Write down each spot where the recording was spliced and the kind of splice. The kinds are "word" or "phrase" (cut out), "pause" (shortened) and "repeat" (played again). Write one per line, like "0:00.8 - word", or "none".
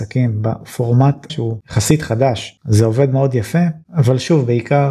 0:01.3 - word